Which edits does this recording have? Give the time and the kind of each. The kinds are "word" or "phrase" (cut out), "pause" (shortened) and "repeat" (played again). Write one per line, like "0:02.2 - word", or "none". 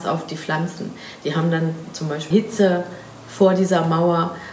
0:02.3 - phrase